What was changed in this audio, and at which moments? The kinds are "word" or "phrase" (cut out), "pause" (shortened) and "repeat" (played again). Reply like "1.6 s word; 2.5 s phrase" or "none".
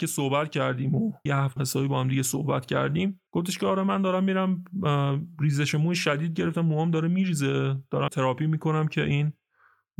1.3 s word; 1.6 s phrase; 3.3 s pause; 8.1 s word